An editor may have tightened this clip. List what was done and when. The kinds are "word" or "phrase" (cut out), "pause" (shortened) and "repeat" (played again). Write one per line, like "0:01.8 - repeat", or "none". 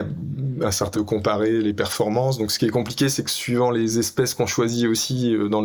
0:00.9 - phrase